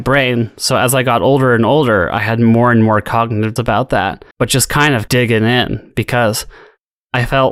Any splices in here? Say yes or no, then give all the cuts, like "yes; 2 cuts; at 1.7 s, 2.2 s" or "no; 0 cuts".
yes; 3 cuts; at 3.6 s, 4.3 s, 5.1 s